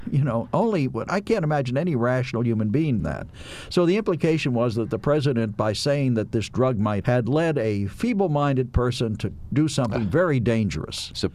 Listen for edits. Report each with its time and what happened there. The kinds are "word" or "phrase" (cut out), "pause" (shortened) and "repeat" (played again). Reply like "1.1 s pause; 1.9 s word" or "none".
1.1 s word; 3.0 s word; 7.0 s word